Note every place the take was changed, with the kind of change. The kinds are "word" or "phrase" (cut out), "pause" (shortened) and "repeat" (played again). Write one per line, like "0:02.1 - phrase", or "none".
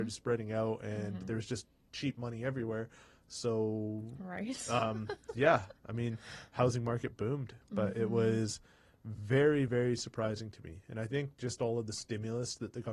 none